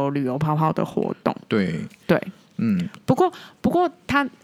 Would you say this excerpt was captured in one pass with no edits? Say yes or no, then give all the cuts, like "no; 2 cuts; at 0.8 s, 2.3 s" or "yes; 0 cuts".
yes; 0 cuts